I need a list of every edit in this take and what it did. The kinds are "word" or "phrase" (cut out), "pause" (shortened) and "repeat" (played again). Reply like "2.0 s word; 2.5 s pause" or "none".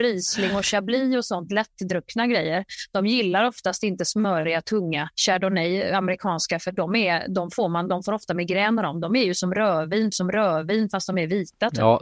5.1 s pause; 10.1 s repeat